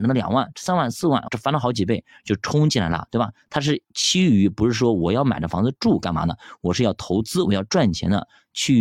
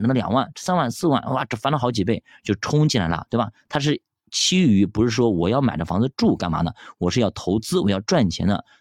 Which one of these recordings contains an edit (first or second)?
first